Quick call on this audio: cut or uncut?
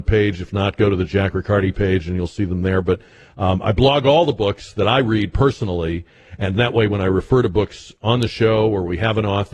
uncut